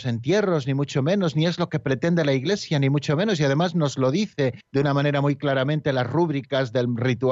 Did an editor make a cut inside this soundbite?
yes; 1 cut; at 4.6 s

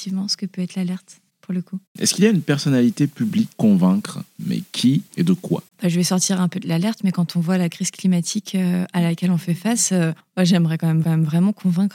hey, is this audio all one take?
no; 7 cuts; at 1.9 s, 3.5 s, 4.3 s, 5.1 s, 5.7 s, 10.2 s, 11.0 s

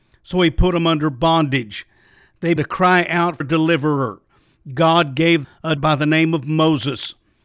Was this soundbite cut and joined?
yes; 4 cuts; at 2.6 s, 3.4 s, 5.4 s, 5.8 s

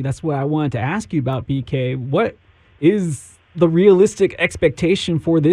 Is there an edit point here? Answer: no; 0 cuts

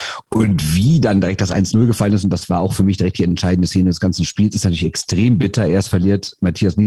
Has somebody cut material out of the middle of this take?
no; 0 cuts

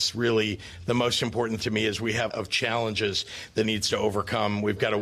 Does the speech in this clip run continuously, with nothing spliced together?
no; 3 cuts; at 1.6 s, 2.3 s, 3.6 s

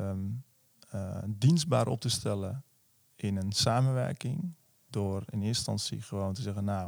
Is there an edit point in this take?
no; 0 cuts

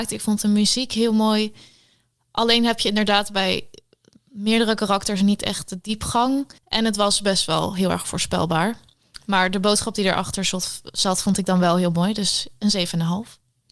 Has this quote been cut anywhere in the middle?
yes; 1 cut; at 6.6 s

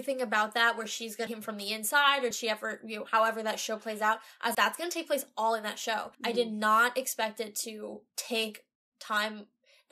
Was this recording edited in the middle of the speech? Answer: yes; 5 cuts; at 1.3 s, 2.3 s, 4.5 s, 6.1 s, 8.1 s

